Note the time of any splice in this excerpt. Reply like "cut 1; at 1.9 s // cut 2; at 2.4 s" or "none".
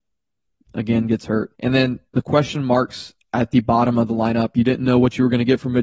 cut 1; at 1.5 s // cut 2; at 2.1 s